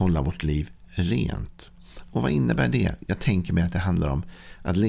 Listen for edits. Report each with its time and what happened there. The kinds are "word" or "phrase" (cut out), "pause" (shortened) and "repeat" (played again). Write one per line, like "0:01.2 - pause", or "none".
none